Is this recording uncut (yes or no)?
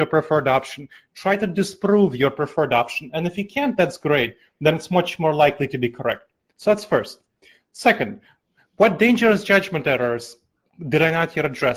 yes